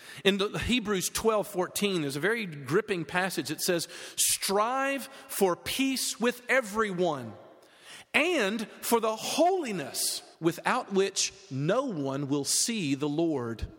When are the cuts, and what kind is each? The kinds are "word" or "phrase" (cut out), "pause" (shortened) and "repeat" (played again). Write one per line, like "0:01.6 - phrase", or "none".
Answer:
0:10.3 - pause